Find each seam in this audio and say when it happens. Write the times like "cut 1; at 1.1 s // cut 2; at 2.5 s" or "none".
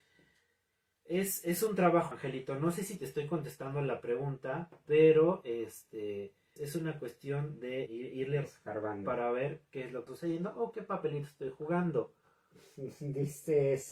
cut 1; at 2.1 s // cut 2; at 6.6 s // cut 3; at 7.9 s // cut 4; at 8.4 s // cut 5; at 10.1 s